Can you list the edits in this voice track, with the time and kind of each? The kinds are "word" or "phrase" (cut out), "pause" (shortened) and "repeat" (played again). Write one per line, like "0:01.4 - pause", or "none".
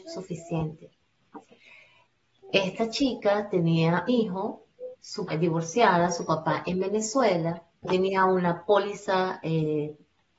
0:04.1 - word
0:05.3 - word
0:07.8 - word